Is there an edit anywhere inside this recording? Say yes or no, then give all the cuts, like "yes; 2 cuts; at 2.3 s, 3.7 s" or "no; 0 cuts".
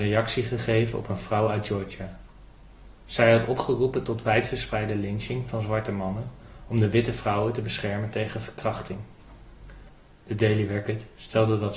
no; 0 cuts